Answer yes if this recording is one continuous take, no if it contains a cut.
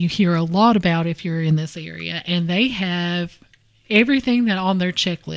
yes